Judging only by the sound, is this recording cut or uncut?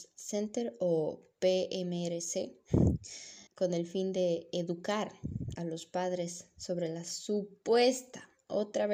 cut